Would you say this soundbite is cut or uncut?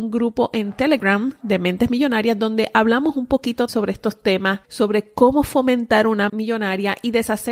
cut